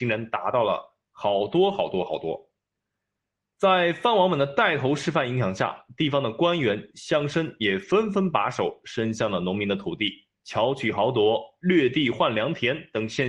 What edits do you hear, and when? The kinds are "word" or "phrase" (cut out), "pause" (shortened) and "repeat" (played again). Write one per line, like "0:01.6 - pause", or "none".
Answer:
0:01.0 - pause